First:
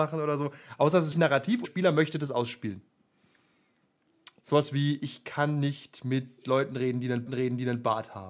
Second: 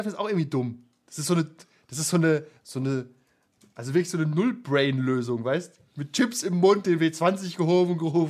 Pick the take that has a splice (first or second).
first